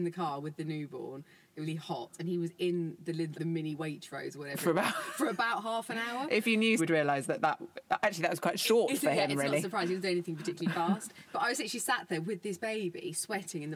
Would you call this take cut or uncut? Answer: cut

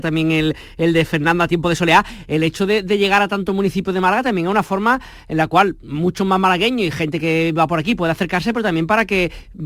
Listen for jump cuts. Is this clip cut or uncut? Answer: uncut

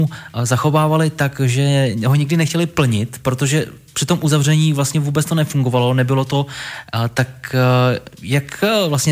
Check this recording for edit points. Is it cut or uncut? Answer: uncut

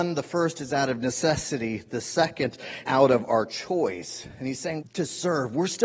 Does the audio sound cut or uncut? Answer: cut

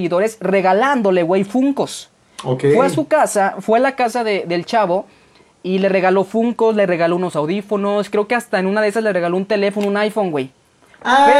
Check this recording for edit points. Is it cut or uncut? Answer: uncut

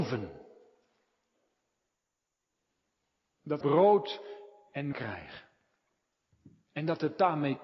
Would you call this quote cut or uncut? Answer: cut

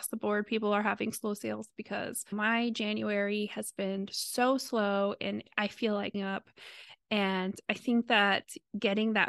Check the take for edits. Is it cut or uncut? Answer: cut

